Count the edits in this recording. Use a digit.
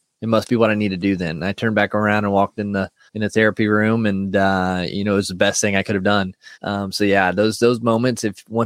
2